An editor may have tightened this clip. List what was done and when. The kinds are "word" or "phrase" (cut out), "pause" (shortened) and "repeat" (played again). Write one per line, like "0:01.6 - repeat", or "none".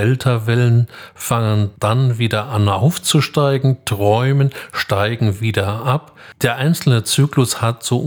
none